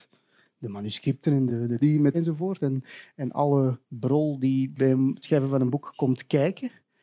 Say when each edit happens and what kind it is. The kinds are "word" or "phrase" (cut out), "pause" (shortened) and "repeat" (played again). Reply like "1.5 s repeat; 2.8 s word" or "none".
1.5 s word; 1.8 s phrase; 2.1 s word; 3.8 s pause; 4.8 s word